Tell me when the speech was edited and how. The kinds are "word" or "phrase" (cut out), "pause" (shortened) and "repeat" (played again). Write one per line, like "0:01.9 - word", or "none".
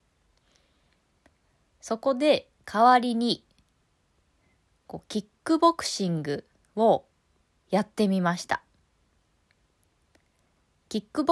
none